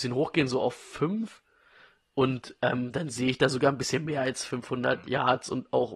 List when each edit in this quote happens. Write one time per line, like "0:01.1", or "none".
none